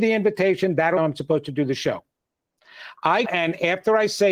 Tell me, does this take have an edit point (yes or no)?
yes